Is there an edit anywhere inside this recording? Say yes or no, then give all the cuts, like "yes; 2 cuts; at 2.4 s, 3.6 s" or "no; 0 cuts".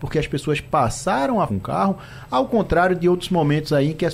yes; 1 cut; at 1.5 s